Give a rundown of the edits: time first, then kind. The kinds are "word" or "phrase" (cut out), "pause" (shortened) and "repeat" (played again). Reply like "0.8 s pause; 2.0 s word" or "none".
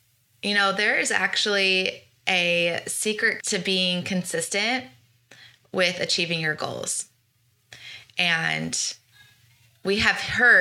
3.4 s word